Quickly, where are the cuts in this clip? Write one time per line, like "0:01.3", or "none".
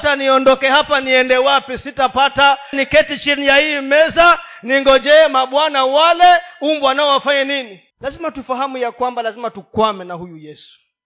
0:02.7
0:07.9